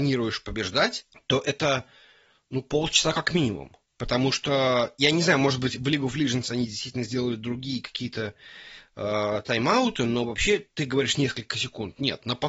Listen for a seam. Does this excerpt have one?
no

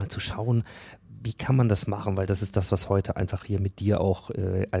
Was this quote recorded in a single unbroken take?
yes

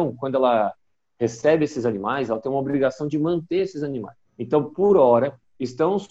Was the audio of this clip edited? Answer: yes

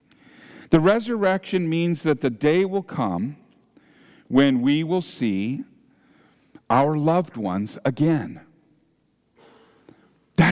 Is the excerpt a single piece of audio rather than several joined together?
yes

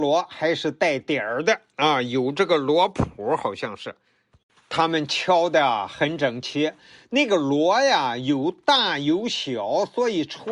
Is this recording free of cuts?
yes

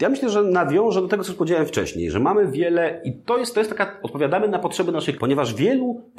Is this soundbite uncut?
no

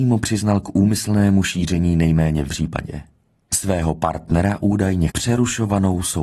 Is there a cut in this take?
yes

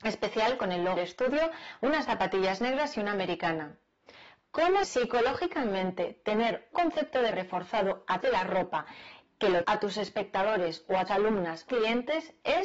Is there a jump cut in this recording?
yes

